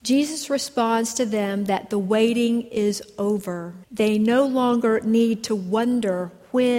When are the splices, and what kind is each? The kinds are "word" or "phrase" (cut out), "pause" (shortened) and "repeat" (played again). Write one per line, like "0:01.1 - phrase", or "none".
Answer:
0:03.8 - pause